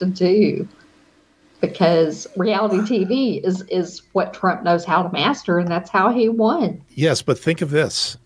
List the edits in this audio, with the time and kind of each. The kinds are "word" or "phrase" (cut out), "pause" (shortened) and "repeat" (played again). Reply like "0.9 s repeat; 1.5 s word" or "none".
6.8 s pause